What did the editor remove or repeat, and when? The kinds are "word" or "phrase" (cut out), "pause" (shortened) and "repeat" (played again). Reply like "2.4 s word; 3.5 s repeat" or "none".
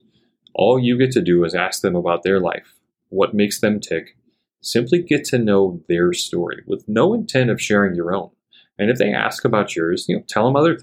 none